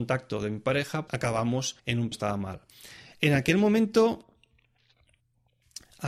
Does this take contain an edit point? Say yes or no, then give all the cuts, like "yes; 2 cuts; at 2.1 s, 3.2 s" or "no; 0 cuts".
yes; 3 cuts; at 1.1 s, 1.8 s, 2.1 s